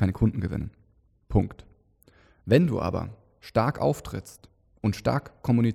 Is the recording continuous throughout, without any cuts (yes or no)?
yes